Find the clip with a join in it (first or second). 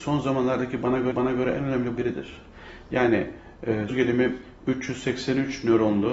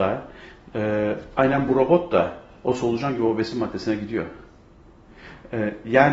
first